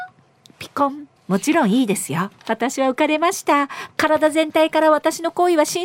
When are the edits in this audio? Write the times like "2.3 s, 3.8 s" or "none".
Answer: 1.2 s, 2.4 s